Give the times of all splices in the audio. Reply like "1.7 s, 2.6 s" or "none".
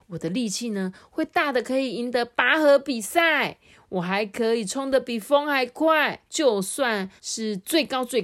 6.3 s, 7.2 s